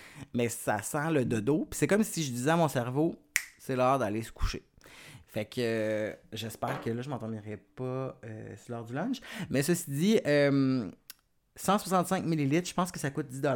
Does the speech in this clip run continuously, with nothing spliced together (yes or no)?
yes